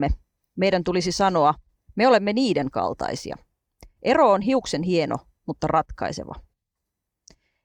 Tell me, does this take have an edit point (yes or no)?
no